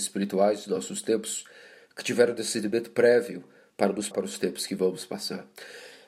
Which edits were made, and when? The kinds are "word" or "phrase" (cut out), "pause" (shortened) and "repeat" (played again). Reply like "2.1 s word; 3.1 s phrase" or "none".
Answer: 4.1 s word